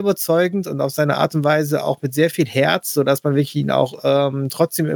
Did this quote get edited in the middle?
no; 0 cuts

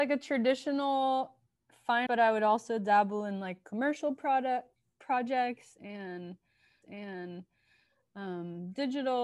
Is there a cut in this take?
yes; 2 cuts; at 2.1 s, 6.8 s

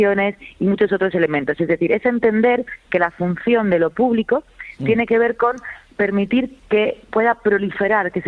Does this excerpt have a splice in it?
no; 0 cuts

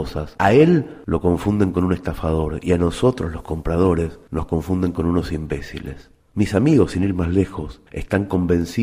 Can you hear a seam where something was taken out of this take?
no; 0 cuts

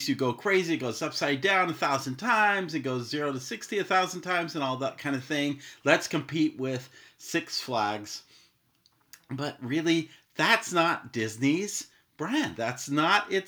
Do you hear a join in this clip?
no; 0 cuts

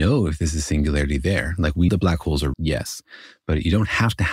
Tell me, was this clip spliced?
yes; 2 cuts; at 1.9 s, 2.5 s

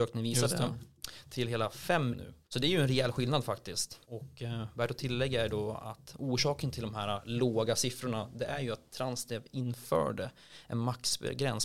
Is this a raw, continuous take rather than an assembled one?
no; 3 cuts; at 2.1 s, 2.4 s, 4.0 s

